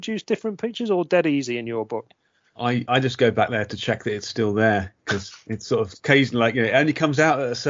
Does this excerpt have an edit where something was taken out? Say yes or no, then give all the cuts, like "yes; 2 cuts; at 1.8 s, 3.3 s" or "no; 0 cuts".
no; 0 cuts